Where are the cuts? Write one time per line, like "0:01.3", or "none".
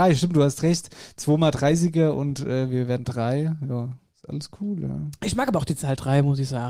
none